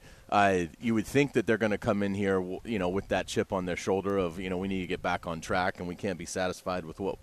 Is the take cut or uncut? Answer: uncut